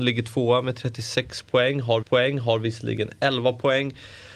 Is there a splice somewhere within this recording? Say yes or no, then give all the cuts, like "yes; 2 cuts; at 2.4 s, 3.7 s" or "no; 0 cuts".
yes; 1 cut; at 2.0 s